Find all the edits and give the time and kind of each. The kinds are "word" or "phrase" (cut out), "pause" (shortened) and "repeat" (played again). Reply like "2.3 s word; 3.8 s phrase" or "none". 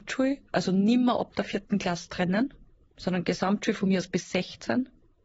2.8 s pause